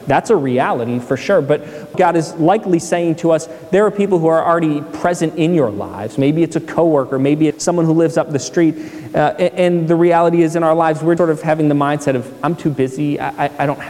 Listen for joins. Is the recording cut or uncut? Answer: cut